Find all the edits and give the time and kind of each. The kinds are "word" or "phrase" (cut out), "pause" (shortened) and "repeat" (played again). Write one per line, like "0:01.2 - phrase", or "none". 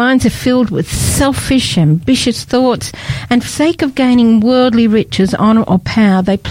0:03.5 - word

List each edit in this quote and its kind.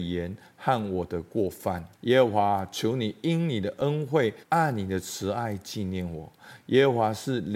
0:01.9 - pause
0:04.4 - pause

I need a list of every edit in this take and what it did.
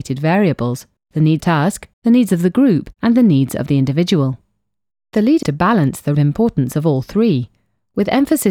0:01.0 - pause
0:01.4 - phrase
0:01.9 - pause
0:02.9 - pause
0:04.9 - pause
0:05.4 - word
0:06.1 - word

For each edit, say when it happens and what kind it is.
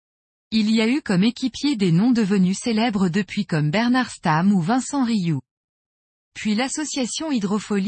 none

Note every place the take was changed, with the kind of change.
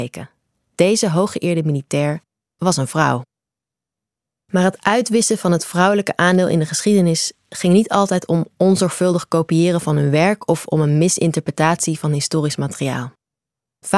none

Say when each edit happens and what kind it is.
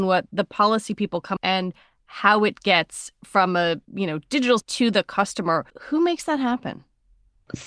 0:01.4 - phrase
0:03.8 - pause
0:04.6 - word
0:05.7 - pause

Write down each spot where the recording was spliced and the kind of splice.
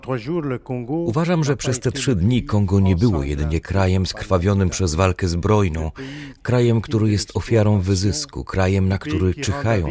none

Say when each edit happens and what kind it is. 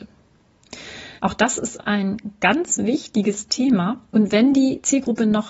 0:01.2 - pause
0:04.1 - pause

